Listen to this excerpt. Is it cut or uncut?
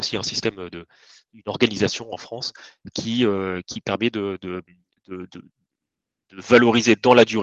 uncut